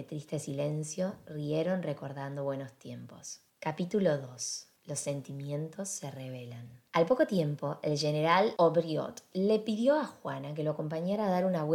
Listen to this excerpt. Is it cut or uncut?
cut